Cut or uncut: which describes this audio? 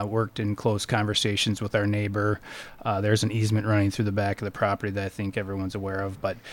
uncut